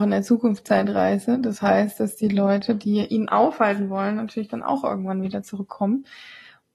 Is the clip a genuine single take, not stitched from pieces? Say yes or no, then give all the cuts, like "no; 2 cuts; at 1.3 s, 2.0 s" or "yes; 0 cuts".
yes; 0 cuts